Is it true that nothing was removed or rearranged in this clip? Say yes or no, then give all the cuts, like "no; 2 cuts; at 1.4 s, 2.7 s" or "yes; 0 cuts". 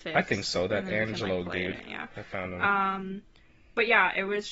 yes; 0 cuts